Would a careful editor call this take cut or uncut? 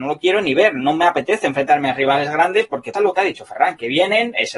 cut